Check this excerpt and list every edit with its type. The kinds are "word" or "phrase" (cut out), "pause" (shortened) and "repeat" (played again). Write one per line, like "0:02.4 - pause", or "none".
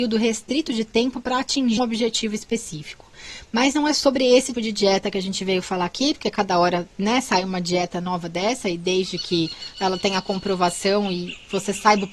0:01.8 - word
0:04.5 - word

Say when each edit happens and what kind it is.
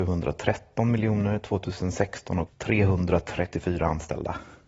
0:02.5 - word

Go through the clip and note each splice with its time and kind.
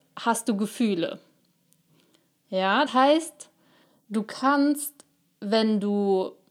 0:02.9 - word

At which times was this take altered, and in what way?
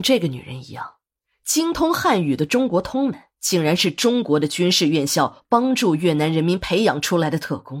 none

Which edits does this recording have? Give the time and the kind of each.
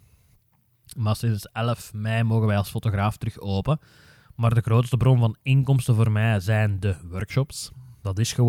none

